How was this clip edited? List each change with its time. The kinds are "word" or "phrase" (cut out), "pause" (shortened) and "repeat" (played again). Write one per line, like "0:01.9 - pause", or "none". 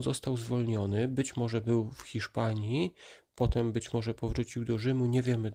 none